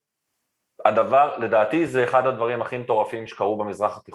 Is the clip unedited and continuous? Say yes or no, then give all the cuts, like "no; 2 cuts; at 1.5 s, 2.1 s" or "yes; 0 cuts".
yes; 0 cuts